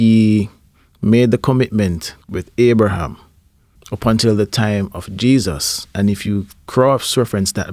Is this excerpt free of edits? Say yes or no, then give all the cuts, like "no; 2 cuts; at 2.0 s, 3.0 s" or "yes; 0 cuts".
no; 1 cut; at 2.2 s